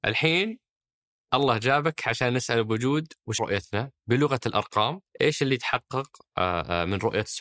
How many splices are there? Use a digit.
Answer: 2